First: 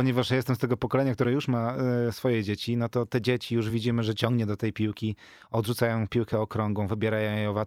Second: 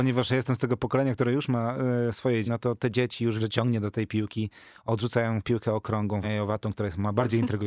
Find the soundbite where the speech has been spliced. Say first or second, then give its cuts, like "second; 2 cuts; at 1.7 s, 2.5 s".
second; 3 cuts; at 2.5 s, 3.4 s, 6.2 s